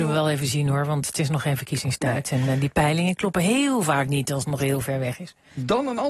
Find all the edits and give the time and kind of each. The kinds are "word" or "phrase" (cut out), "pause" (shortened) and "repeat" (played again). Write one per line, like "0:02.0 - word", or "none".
none